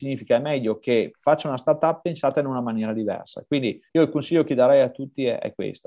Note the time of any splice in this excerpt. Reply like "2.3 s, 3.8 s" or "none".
3.9 s